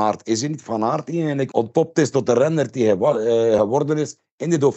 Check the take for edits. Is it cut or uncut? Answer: uncut